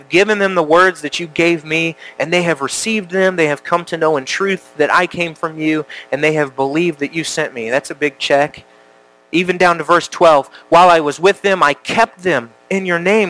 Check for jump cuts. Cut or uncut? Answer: uncut